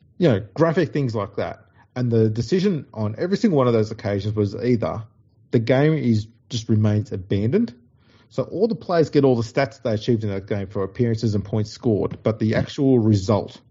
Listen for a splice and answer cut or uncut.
uncut